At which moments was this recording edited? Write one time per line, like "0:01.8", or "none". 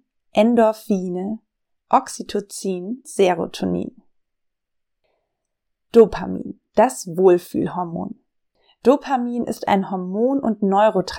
0:03.0